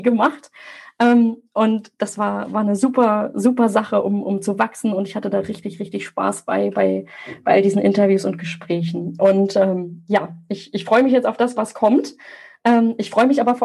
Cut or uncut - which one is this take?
uncut